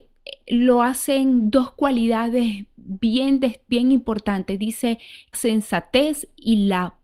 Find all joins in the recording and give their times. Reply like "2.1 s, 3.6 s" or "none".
3.7 s, 5.3 s